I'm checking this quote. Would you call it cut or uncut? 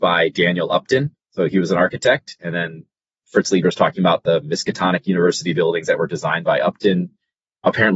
uncut